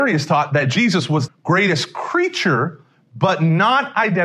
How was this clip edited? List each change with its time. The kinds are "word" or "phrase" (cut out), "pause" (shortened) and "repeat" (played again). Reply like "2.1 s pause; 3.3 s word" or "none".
1.3 s word